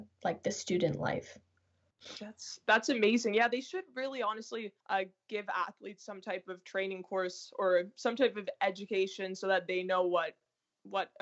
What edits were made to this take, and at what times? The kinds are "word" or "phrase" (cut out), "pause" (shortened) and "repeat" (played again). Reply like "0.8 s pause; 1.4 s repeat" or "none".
4.8 s pause